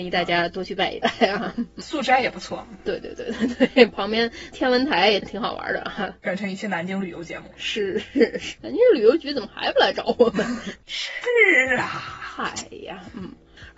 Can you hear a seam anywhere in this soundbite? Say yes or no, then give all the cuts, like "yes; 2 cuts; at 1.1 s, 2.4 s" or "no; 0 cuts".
yes; 1 cut; at 1.8 s